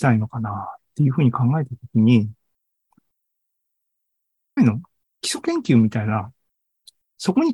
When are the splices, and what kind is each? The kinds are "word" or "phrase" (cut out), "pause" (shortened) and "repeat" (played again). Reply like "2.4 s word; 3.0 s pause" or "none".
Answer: 4.6 s word